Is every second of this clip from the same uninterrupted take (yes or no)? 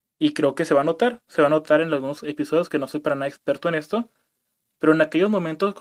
yes